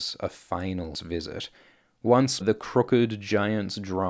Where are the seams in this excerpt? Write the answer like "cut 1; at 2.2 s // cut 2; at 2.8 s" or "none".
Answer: cut 1; at 0.9 s // cut 2; at 2.4 s